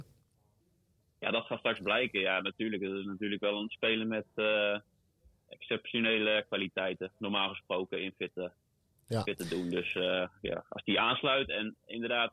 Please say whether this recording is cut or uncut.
uncut